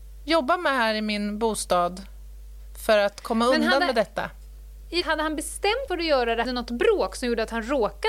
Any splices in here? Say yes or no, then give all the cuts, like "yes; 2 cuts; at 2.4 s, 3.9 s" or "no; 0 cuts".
yes; 3 cuts; at 5.0 s, 5.9 s, 6.4 s